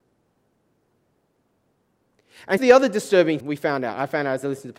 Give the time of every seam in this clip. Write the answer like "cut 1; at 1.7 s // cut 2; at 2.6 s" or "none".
cut 1; at 2.6 s // cut 2; at 3.4 s